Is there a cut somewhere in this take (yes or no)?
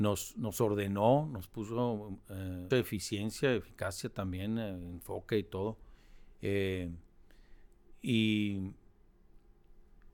yes